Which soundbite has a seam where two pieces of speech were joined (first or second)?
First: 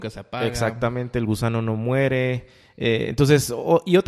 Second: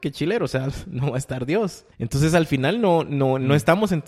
second